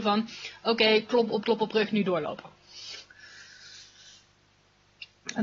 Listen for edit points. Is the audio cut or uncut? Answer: cut